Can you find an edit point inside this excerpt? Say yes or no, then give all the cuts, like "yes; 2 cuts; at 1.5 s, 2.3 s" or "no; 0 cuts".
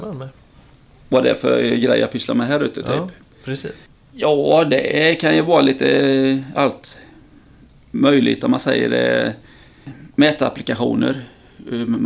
no; 0 cuts